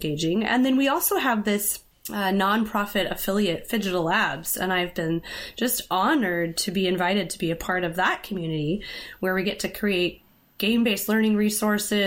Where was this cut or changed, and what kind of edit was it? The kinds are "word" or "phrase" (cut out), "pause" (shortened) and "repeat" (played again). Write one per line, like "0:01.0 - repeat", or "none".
none